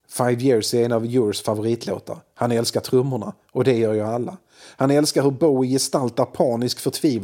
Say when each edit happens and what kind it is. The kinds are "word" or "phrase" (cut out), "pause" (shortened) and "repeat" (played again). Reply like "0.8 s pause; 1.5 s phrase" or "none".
none